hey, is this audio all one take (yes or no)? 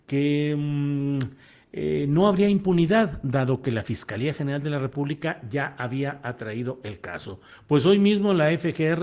yes